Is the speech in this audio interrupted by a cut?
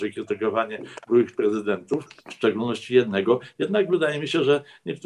yes; 1 cut; at 2.2 s

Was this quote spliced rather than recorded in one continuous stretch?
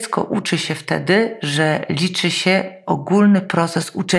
no; 0 cuts

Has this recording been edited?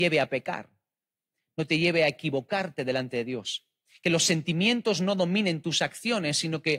no; 0 cuts

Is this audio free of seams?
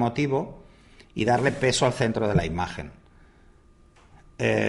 yes; 0 cuts

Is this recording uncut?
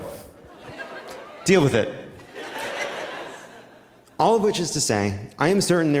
yes; 0 cuts

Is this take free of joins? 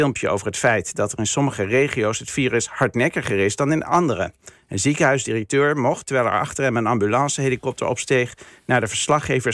yes; 0 cuts

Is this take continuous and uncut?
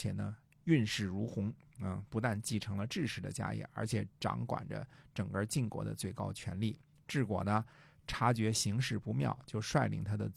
yes; 0 cuts

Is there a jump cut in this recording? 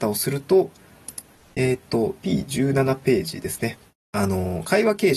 no; 0 cuts

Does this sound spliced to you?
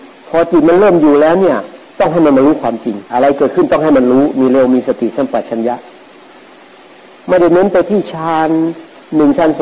yes; 2 cuts; at 1.9 s, 3.1 s

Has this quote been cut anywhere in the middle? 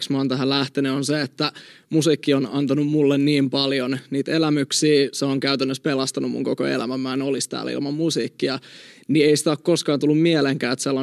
no; 0 cuts

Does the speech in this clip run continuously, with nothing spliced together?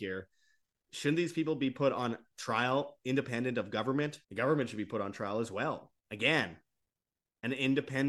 no; 2 cuts; at 4.2 s, 6.0 s

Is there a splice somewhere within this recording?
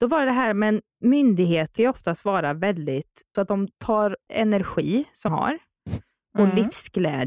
yes; 4 cuts; at 1.8 s, 3.3 s, 4.3 s, 5.3 s

